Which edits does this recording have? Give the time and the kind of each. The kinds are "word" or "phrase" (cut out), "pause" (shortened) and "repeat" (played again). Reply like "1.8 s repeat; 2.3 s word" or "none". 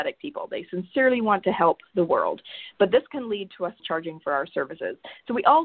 3.8 s phrase